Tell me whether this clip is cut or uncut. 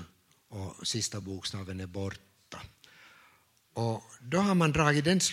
uncut